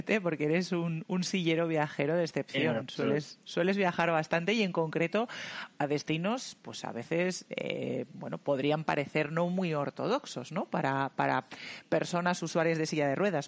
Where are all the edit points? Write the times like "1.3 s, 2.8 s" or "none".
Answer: none